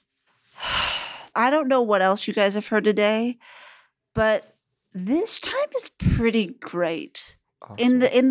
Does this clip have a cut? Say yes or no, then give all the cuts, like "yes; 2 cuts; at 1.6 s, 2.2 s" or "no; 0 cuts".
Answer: no; 0 cuts